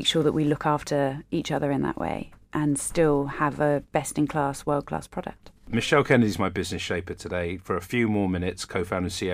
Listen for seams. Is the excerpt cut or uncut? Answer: cut